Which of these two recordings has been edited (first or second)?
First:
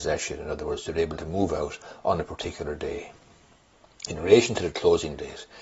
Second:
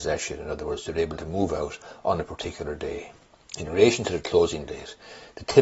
second